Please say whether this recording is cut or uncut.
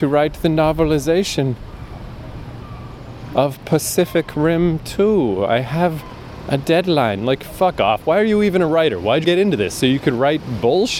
cut